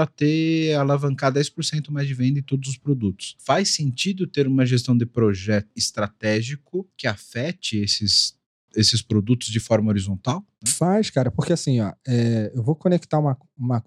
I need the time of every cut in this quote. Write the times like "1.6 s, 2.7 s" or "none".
none